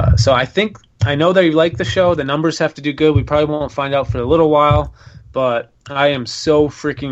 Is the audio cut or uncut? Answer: uncut